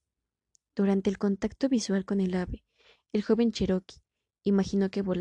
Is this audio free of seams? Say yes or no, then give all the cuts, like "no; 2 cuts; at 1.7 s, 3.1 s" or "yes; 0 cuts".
yes; 0 cuts